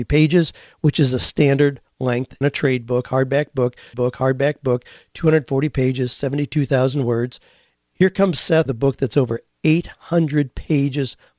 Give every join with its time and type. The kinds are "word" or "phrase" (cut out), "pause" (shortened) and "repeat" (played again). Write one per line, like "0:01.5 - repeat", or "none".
0:02.4 - word
0:03.9 - repeat
0:08.7 - word